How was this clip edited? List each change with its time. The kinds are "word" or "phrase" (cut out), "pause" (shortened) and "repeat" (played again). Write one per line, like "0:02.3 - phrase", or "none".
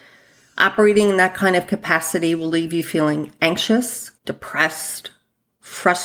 0:04.2 - pause